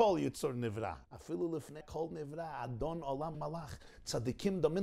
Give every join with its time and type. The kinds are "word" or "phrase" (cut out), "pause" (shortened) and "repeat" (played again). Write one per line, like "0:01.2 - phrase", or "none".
0:01.0 - pause
0:01.8 - word
0:03.3 - word